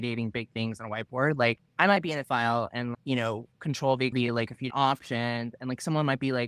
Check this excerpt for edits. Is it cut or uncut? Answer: cut